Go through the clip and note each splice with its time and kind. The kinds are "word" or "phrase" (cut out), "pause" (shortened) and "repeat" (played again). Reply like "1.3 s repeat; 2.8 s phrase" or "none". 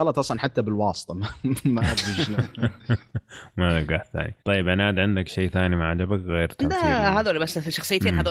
4.4 s pause